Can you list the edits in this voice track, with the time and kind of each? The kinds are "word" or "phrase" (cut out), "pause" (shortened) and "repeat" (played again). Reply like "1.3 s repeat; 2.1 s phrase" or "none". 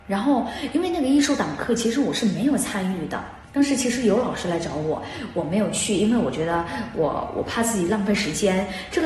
3.4 s pause

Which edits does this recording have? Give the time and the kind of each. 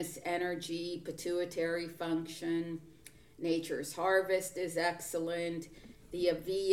none

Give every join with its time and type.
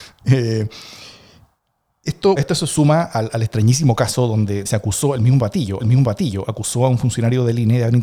2.4 s word; 4.7 s word; 5.8 s repeat

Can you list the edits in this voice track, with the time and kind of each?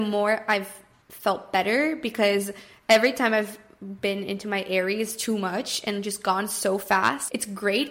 none

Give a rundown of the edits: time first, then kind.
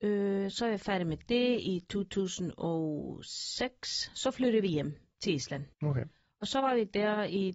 5.7 s pause

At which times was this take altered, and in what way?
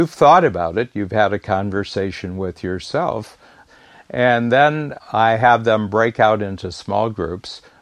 none

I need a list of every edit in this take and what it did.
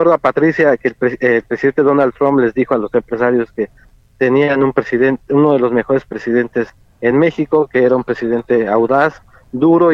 none

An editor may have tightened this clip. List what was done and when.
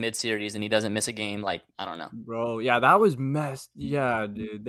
1.7 s pause

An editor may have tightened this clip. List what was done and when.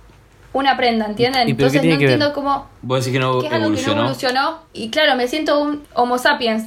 4.7 s pause

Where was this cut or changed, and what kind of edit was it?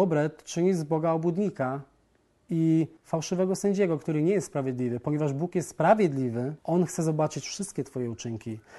3.0 s pause; 6.6 s pause

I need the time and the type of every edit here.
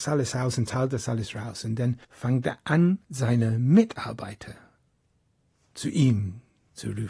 2.0 s pause; 3.0 s pause

